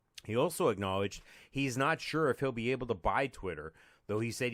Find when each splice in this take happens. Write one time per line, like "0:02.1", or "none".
none